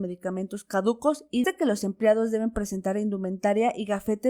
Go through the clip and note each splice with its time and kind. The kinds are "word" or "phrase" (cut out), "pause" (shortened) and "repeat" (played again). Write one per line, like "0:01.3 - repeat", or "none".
0:01.4 - phrase